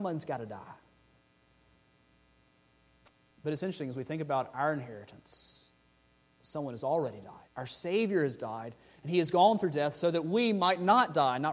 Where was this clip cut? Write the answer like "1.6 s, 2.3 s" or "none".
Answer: 7.5 s